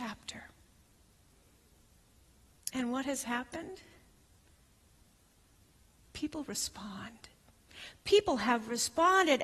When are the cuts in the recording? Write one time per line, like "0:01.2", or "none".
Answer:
none